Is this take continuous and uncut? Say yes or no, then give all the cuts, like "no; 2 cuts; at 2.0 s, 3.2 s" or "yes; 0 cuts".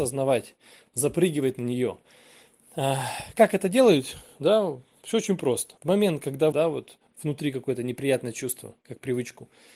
no; 2 cuts; at 5.8 s, 6.5 s